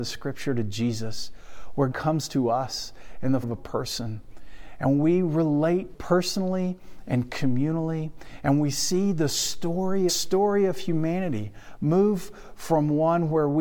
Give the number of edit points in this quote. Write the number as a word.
four